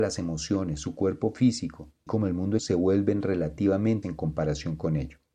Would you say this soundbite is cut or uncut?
cut